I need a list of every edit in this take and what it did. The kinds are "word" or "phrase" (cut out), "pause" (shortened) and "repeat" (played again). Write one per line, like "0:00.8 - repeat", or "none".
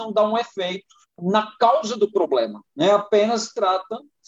0:01.0 - pause
0:02.7 - pause